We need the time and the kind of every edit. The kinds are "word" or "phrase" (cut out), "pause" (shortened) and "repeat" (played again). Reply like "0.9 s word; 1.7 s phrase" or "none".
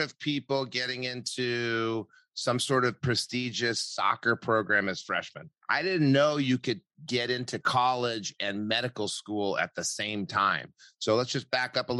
5.6 s pause